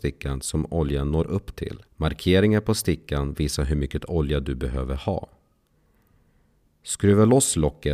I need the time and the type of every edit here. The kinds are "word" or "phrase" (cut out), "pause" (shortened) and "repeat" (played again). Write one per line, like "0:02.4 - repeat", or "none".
0:01.9 - pause